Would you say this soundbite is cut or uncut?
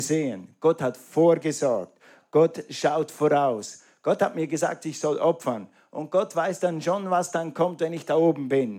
uncut